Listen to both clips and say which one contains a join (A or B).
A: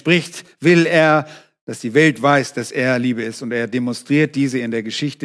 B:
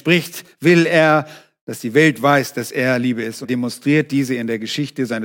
B